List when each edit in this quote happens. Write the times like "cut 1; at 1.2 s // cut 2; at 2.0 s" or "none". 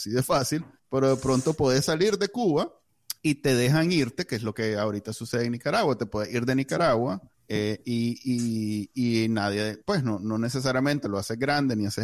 none